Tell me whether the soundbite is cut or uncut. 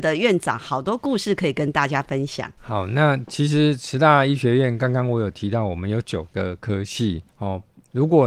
cut